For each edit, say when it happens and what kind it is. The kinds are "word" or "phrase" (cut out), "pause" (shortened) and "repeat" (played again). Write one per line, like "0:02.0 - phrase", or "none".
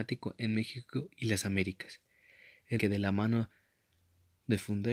0:02.8 - word